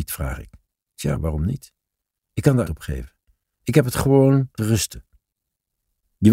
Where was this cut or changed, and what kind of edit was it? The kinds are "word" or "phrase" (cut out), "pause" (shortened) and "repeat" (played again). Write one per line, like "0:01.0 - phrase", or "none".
0:02.7 - phrase
0:04.6 - word